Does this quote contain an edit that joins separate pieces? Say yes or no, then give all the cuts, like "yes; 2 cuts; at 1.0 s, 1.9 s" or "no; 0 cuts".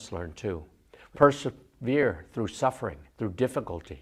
yes; 2 cuts; at 1.1 s, 3.1 s